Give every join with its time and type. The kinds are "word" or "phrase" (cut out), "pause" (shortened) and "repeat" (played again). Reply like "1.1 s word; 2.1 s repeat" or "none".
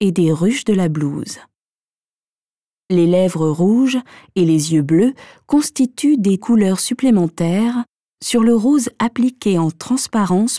6.4 s phrase